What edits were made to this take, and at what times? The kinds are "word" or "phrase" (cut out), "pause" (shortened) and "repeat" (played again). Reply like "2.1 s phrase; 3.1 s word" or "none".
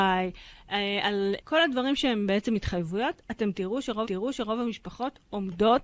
1.4 s word; 4.0 s repeat